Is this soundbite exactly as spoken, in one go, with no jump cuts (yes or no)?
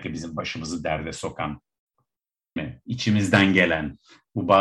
no